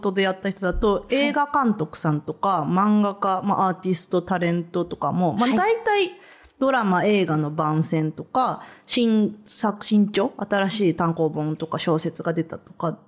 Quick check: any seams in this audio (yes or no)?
no